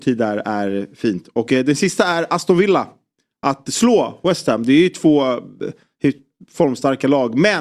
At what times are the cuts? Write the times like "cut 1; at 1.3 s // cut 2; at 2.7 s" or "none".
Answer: none